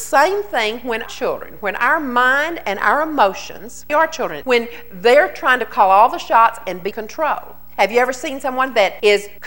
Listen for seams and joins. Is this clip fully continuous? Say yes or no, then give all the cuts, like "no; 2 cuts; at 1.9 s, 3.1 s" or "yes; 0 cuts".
no; 4 cuts; at 1.1 s, 3.9 s, 4.4 s, 6.9 s